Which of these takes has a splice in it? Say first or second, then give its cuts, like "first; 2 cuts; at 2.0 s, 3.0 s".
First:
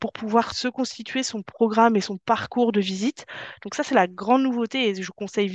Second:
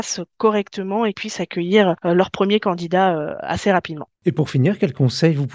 second; 2 cuts; at 1.1 s, 4.2 s